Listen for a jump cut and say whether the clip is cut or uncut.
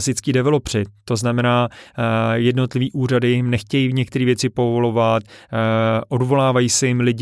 uncut